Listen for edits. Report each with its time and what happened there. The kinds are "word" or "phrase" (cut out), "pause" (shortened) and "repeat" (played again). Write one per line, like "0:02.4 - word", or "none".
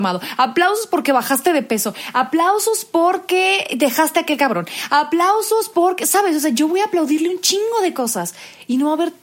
none